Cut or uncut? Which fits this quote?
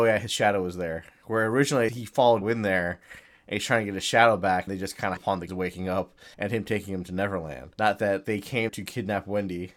cut